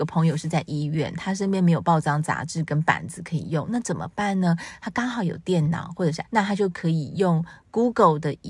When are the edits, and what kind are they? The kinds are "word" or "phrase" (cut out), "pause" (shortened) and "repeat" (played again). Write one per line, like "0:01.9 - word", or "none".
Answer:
0:06.2 - word